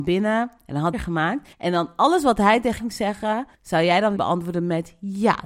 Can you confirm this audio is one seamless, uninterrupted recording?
no; 5 cuts; at 0.9 s, 1.5 s, 2.8 s, 3.5 s, 4.2 s

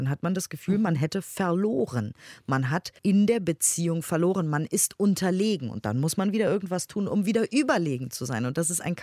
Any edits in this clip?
yes; 1 cut; at 3.0 s

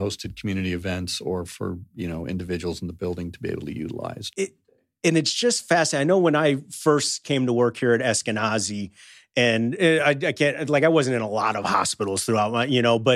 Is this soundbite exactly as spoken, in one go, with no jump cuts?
yes; 0 cuts

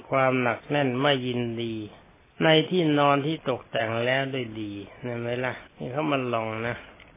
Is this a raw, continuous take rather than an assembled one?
no; 2 cuts; at 2.2 s, 5.7 s

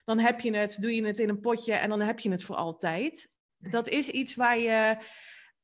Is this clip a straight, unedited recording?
yes; 0 cuts

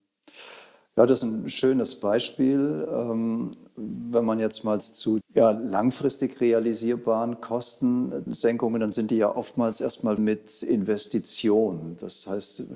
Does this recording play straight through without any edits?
no; 4 cuts; at 4.8 s, 5.2 s, 8.3 s, 10.2 s

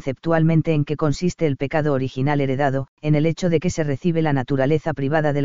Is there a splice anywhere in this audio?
yes; 1 cut; at 2.9 s

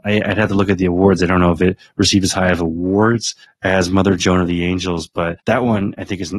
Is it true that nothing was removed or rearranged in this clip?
no; 2 cuts; at 3.4 s, 5.4 s

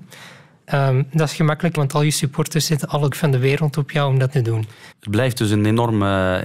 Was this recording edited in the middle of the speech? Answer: yes; 4 cuts; at 1.8 s, 3.1 s, 4.3 s, 4.9 s

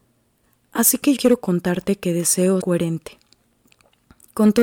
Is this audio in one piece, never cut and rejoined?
no; 2 cuts; at 1.2 s, 2.6 s

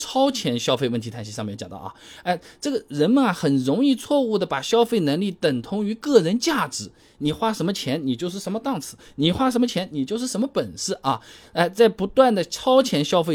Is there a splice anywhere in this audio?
no; 0 cuts

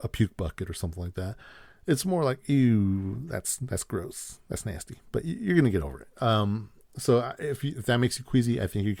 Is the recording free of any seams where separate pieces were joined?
yes; 0 cuts

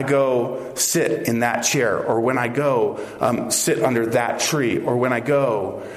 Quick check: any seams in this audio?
no; 0 cuts

